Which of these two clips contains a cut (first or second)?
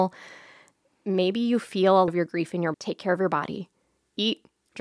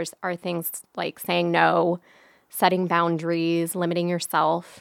first